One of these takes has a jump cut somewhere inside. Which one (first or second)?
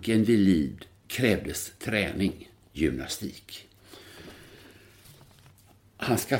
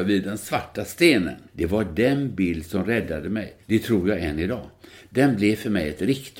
second